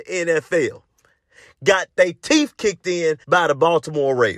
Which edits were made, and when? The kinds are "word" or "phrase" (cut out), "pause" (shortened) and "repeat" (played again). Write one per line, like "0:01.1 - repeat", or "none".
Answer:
0:03.2 - pause

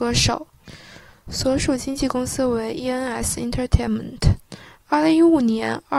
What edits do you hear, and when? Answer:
none

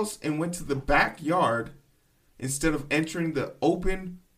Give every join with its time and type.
none

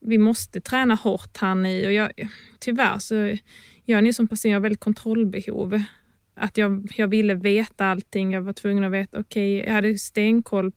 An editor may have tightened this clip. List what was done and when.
none

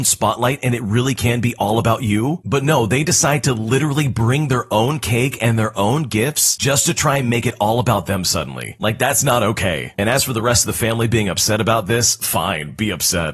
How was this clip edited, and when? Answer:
none

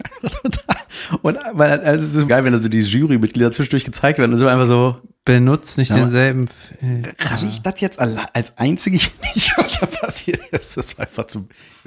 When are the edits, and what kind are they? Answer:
0:02.3 - word
0:05.2 - pause

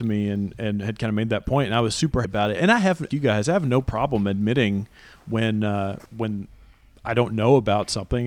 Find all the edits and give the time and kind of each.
0:02.2 - word
0:03.1 - phrase
0:06.1 - pause

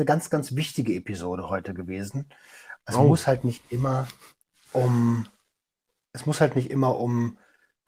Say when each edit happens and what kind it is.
none

